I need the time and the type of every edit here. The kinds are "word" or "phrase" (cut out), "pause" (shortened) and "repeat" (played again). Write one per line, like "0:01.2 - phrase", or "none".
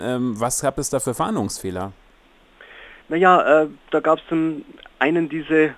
0:03.0 - pause